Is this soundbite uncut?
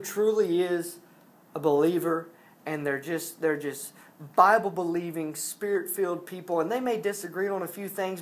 yes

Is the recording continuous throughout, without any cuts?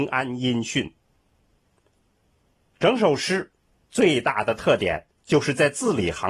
yes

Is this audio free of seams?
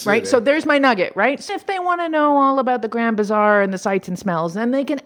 no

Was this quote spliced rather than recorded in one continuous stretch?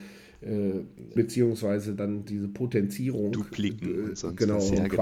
yes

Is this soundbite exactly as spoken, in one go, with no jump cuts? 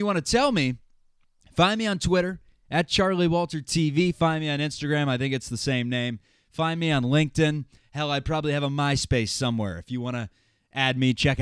yes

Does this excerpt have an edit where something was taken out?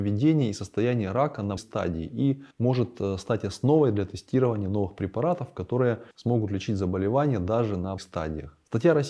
yes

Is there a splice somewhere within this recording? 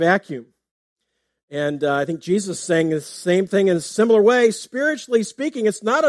no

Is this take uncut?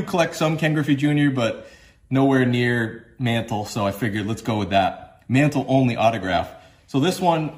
yes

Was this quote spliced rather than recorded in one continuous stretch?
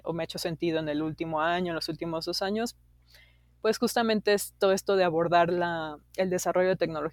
no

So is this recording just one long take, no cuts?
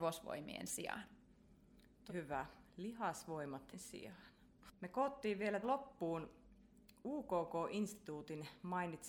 no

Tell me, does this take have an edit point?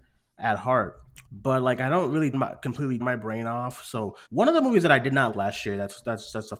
yes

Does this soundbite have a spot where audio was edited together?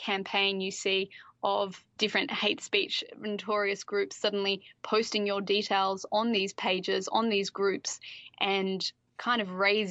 yes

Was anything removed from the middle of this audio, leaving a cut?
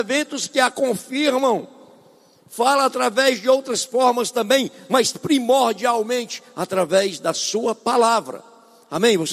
no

